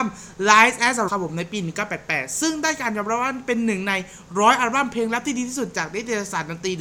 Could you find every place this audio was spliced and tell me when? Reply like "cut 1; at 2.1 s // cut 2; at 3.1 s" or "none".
cut 1; at 1.1 s

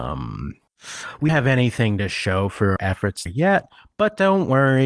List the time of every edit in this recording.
cut 1; at 1.3 s // cut 2; at 2.8 s // cut 3; at 3.3 s

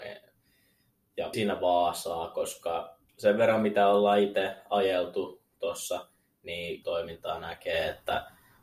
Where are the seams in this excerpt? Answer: cut 1; at 1.3 s // cut 2; at 3.1 s // cut 3; at 6.8 s

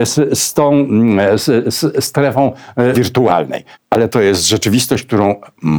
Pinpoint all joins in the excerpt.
cut 1; at 2.9 s // cut 2; at 3.7 s

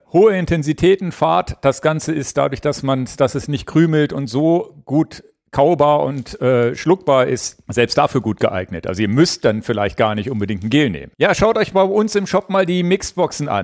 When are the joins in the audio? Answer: cut 1; at 7.6 s

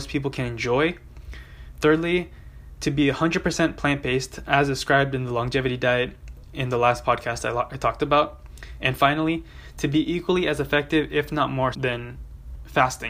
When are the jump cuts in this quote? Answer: cut 1; at 11.7 s

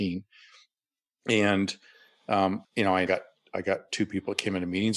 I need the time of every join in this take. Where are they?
cut 1; at 2.6 s // cut 2; at 3.1 s

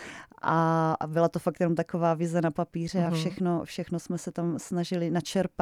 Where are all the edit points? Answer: none

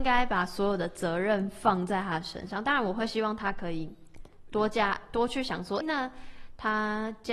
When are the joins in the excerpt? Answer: cut 1; at 5.8 s

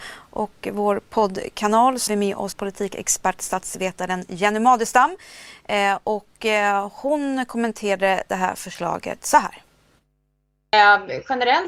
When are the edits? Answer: cut 1; at 2.1 s // cut 2; at 2.5 s

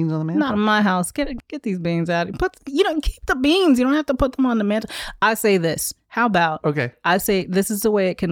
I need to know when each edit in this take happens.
cut 1; at 1.4 s

